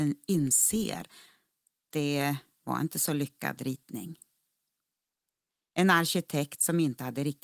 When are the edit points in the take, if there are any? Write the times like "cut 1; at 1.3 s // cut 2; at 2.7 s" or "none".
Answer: cut 1; at 1.9 s